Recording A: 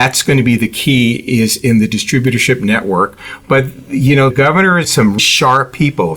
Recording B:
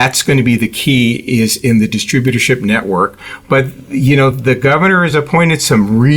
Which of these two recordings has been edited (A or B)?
A